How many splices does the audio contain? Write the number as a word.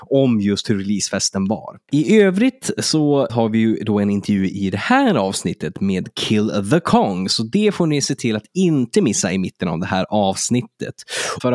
one